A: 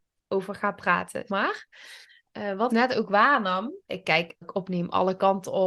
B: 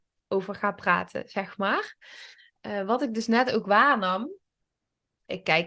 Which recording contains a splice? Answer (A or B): A